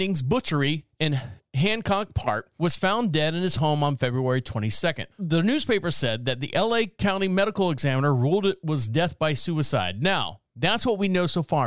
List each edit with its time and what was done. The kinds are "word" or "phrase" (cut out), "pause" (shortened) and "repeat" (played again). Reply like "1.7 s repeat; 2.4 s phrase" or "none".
5.1 s pause